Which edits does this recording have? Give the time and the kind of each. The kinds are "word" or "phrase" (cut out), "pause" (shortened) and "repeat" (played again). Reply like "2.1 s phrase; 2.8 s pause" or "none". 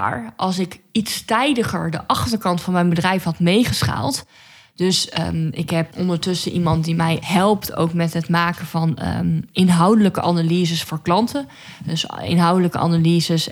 none